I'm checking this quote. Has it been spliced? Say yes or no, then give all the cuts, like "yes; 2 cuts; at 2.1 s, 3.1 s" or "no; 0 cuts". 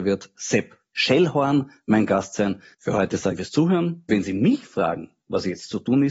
yes; 3 cuts; at 2.7 s, 3.4 s, 4.1 s